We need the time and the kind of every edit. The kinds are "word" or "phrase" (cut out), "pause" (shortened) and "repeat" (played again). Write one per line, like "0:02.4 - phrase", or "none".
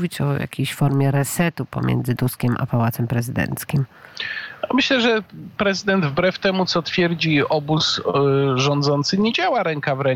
0:02.2 - word
0:05.6 - word